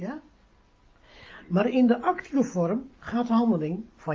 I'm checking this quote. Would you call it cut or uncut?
uncut